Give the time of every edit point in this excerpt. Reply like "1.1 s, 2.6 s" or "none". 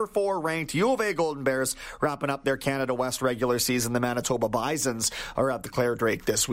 none